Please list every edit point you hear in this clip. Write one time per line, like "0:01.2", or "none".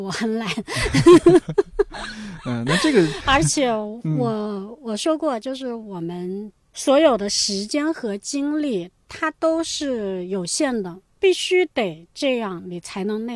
none

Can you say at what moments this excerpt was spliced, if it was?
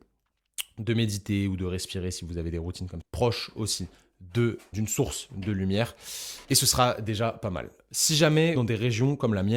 0:03.0
0:04.7
0:06.4
0:08.6

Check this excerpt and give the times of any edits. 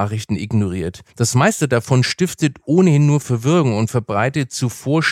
0:01.1

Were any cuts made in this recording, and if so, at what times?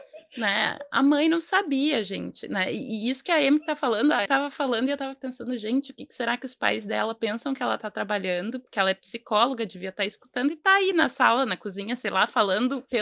0:04.3

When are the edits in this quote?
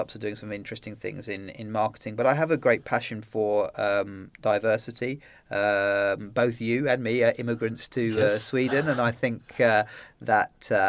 none

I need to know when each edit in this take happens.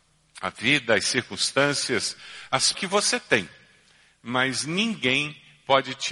0:02.7

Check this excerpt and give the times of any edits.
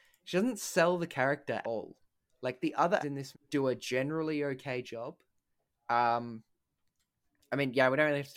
0:01.6
0:03.0
0:03.3

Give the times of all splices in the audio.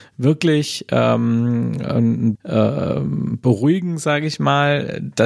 0:02.3

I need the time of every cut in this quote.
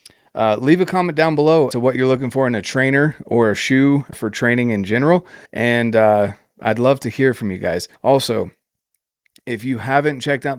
0:01.7
0:04.1
0:05.5
0:08.0

